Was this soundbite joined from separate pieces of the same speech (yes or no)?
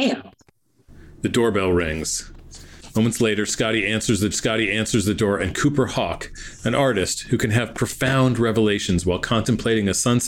yes